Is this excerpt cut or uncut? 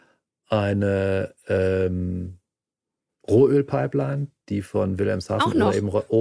uncut